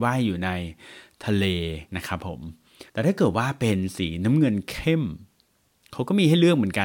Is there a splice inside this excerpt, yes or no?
yes